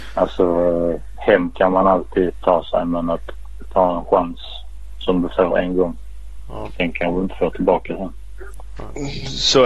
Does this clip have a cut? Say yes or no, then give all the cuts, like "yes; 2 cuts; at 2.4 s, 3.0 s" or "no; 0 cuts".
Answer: no; 0 cuts